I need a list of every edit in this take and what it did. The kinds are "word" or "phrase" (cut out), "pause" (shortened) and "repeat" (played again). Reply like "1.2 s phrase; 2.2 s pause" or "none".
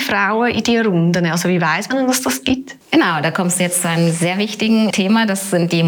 2.8 s pause